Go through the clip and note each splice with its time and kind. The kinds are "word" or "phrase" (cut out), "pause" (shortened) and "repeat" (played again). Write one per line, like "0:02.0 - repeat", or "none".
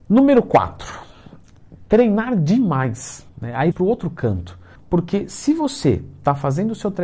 0:03.3 - pause
0:03.7 - word
0:04.8 - pause